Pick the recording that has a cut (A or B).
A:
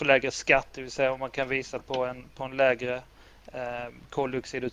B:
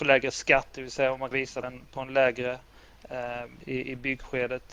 B